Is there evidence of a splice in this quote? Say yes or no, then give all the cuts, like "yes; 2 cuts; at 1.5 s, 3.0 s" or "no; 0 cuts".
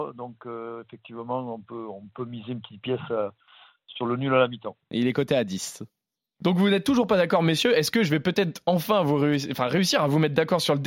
no; 0 cuts